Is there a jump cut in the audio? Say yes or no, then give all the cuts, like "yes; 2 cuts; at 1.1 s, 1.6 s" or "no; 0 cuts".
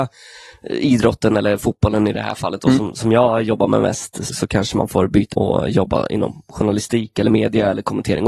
yes; 2 cuts; at 4.3 s, 5.3 s